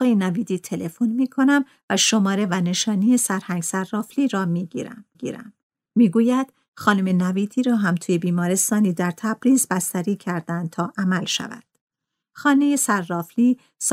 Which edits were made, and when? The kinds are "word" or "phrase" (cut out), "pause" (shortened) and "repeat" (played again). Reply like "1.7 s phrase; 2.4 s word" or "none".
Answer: 5.1 s repeat